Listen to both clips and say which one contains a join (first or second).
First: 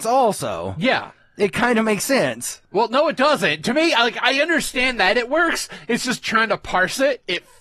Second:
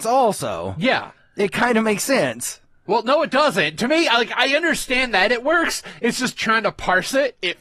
first